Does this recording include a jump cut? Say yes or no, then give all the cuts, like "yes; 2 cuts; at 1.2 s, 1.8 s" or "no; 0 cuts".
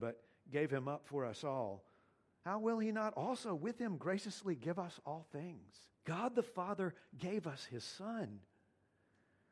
yes; 1 cut; at 5.9 s